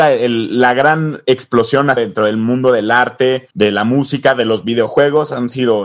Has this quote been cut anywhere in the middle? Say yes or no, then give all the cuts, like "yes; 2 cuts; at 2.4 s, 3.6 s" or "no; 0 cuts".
yes; 2 cuts; at 2.0 s, 3.5 s